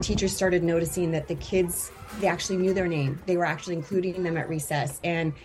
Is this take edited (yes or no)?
no